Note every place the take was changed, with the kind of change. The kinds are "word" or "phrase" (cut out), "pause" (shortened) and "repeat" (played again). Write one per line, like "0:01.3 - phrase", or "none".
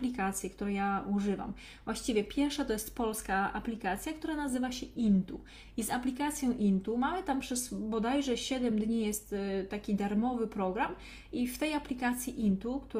none